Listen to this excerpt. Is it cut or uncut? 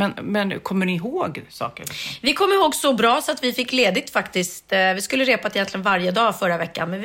uncut